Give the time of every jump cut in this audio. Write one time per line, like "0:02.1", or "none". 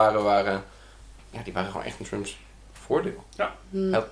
none